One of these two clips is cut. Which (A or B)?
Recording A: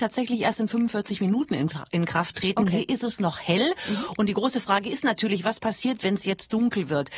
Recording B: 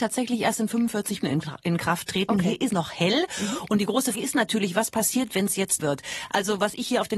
B